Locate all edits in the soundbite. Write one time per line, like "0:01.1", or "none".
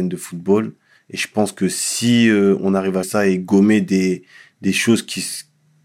0:03.0